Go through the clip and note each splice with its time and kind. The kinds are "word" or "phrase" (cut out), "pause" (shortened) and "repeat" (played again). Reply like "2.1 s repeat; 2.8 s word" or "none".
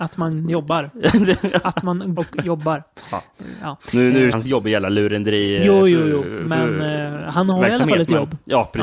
2.2 s phrase; 4.3 s word